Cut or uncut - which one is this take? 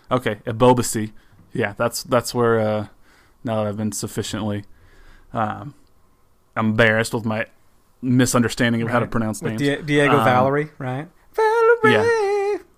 uncut